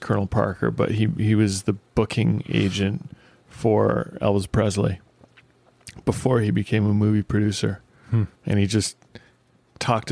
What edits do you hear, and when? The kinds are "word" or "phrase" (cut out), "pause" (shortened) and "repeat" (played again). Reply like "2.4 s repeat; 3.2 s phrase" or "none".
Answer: 8.4 s pause